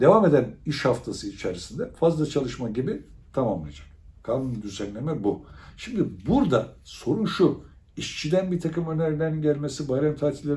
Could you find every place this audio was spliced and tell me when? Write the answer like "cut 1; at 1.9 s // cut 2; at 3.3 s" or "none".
cut 1; at 4.6 s